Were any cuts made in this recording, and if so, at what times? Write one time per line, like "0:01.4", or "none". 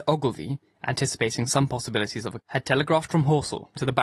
0:02.4